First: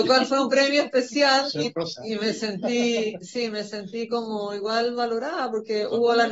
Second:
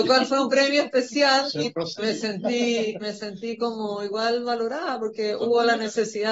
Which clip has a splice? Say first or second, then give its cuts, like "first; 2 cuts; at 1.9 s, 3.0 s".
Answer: second; 2 cuts; at 2.0 s, 3.0 s